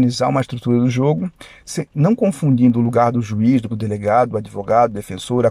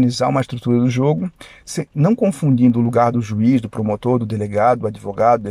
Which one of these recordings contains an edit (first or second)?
first